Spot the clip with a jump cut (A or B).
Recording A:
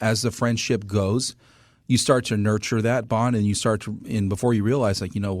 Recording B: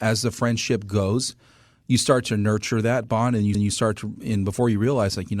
B